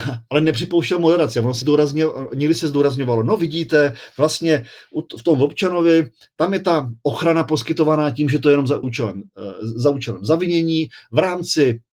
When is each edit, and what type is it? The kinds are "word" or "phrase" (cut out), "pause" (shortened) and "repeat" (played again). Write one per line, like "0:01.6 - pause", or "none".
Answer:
0:01.6 - word
0:08.8 - word